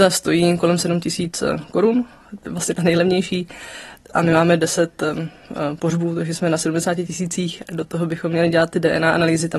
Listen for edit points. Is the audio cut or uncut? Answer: uncut